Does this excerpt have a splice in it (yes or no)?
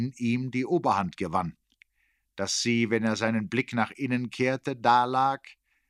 no